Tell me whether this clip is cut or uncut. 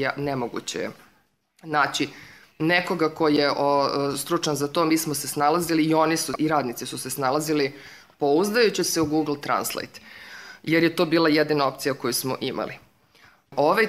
uncut